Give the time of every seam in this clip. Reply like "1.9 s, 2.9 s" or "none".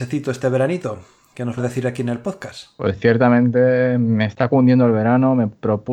1.6 s